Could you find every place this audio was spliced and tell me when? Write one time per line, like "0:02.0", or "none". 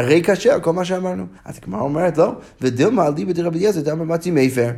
0:01.4